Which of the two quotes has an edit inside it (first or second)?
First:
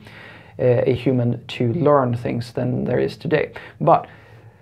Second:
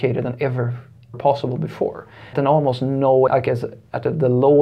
second